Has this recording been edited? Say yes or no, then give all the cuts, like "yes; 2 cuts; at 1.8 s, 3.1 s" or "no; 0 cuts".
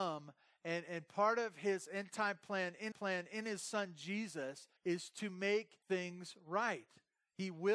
yes; 3 cuts; at 2.9 s, 4.8 s, 5.8 s